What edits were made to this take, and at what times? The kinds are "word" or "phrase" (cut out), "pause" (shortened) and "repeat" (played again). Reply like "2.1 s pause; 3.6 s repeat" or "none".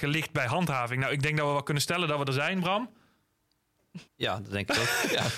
4.1 s pause